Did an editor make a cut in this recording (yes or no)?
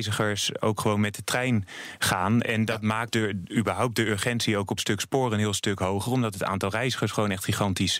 yes